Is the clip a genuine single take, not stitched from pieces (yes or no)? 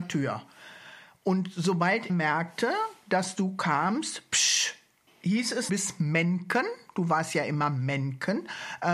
no